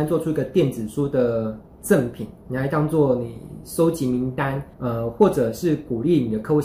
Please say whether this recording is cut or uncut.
cut